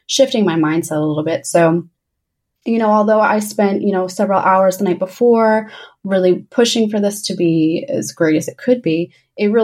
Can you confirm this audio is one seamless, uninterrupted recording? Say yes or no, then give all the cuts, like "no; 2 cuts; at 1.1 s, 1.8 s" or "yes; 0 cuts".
yes; 0 cuts